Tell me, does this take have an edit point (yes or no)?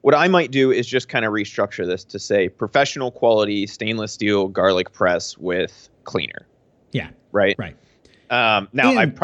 yes